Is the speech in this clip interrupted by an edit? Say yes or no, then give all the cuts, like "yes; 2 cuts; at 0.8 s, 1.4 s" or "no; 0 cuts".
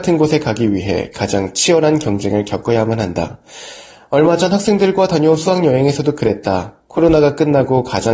no; 0 cuts